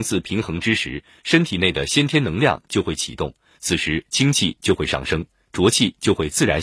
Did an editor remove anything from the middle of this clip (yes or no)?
no